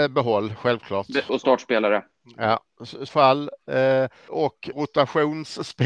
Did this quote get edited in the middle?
yes; 4 cuts; at 1.3 s, 3.1 s, 4.3 s, 4.7 s

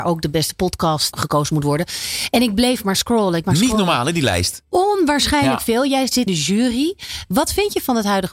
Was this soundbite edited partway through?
yes; 3 cuts; at 1.1 s, 3.4 s, 6.3 s

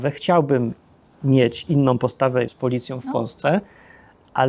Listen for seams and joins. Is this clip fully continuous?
no; 1 cut; at 2.5 s

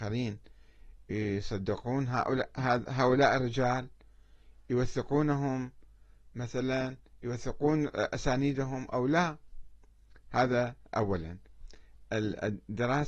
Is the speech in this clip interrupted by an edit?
no; 0 cuts

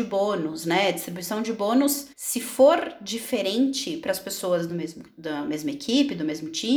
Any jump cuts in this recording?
yes; 1 cut; at 2.1 s

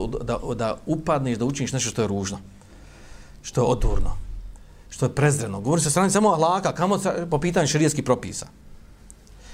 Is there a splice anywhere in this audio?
no; 0 cuts

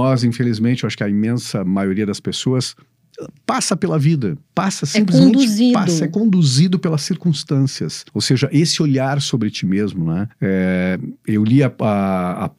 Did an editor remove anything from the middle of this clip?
yes; 3 cuts; at 4.4 s, 8.1 s, 10.3 s

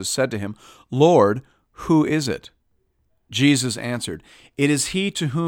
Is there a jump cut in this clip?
no; 0 cuts

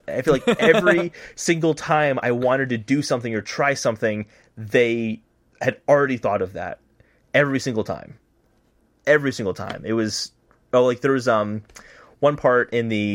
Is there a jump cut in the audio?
no; 0 cuts

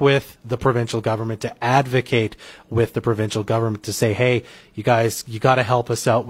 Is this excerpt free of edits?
yes; 0 cuts

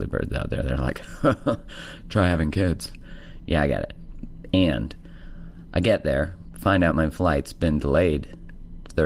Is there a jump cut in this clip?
no; 0 cuts

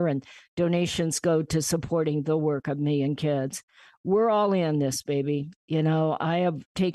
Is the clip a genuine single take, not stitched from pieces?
yes; 0 cuts

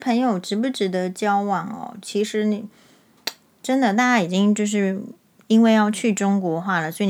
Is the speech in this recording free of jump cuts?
yes; 0 cuts

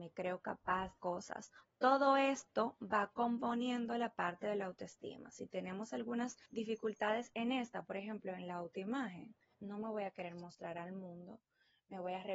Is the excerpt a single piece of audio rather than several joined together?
no; 4 cuts; at 1.0 s, 1.6 s, 6.4 s, 9.5 s

